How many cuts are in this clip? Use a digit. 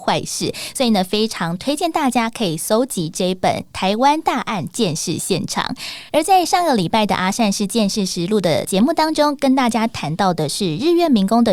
1